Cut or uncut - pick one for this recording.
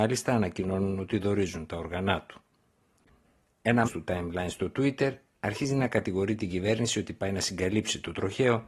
cut